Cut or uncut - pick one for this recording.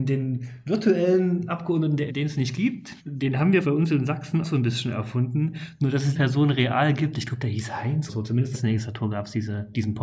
cut